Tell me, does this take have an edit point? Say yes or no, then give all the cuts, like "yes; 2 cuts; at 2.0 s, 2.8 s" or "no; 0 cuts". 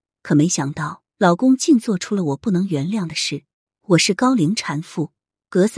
yes; 2 cuts; at 1.1 s, 3.5 s